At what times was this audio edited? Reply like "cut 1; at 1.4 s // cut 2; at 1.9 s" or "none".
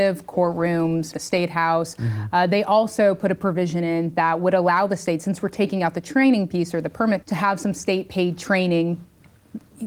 cut 1; at 1.1 s // cut 2; at 7.2 s